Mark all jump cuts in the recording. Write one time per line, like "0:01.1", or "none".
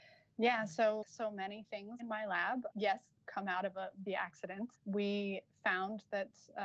0:01.0
0:02.0
0:02.7
0:03.2
0:04.1
0:04.7